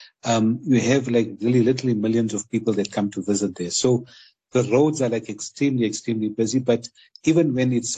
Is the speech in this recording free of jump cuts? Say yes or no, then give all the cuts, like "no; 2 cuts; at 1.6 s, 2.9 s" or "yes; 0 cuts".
yes; 0 cuts